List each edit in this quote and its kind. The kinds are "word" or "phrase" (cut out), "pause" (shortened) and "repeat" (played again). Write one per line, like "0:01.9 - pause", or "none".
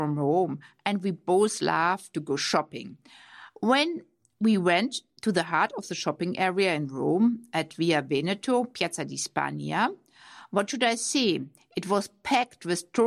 none